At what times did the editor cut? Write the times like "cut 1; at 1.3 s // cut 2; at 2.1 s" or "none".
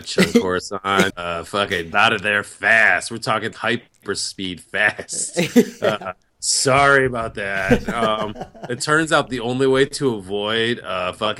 cut 1; at 1.1 s // cut 2; at 1.9 s // cut 3; at 3.5 s